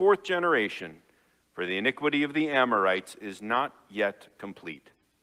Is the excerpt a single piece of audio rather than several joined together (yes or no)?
yes